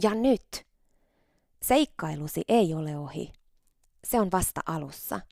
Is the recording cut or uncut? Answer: uncut